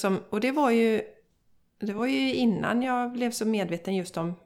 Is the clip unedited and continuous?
yes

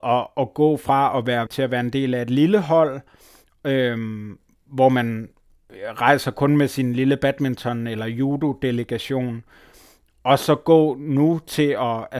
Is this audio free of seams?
no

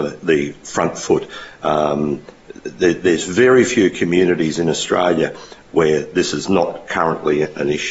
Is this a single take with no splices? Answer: yes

